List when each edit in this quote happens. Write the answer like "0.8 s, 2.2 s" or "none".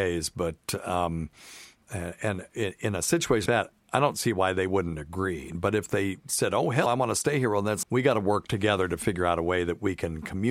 3.5 s, 6.9 s, 7.8 s